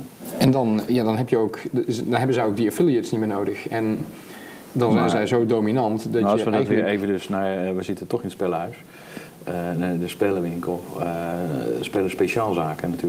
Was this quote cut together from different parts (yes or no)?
no